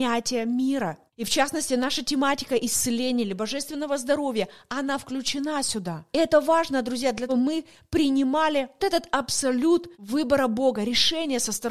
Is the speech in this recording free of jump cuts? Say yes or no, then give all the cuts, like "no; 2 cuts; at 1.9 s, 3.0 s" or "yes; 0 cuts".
no; 5 cuts; at 1.1 s, 6.1 s, 7.3 s, 8.8 s, 9.9 s